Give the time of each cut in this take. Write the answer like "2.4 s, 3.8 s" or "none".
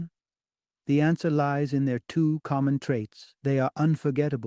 3.4 s